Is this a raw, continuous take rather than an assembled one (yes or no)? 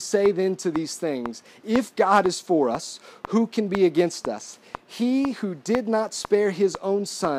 yes